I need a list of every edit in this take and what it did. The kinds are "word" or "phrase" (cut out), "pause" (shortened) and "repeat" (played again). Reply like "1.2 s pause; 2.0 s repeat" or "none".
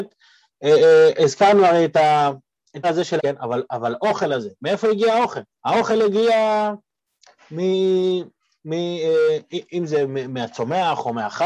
2.8 s word; 3.2 s word; 5.5 s pause